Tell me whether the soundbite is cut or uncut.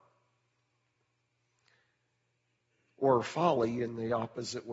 uncut